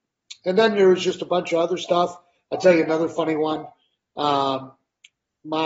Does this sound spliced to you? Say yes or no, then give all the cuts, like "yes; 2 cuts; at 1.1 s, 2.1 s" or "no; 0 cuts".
no; 0 cuts